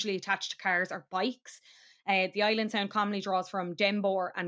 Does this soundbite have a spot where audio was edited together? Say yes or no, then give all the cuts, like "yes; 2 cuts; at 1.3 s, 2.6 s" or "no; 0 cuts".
no; 0 cuts